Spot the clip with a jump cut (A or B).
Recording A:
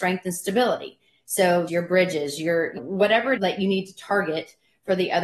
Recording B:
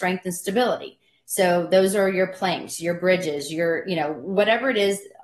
A